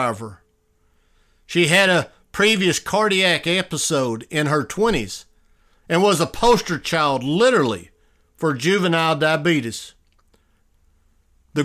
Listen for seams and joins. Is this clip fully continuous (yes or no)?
yes